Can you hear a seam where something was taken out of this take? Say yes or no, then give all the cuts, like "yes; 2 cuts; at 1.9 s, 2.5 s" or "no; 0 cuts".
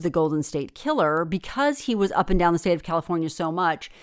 no; 0 cuts